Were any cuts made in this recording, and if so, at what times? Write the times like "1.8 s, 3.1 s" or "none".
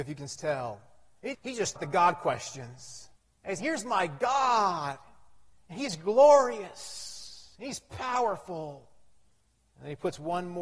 1.3 s, 1.8 s, 3.2 s, 3.6 s, 9.5 s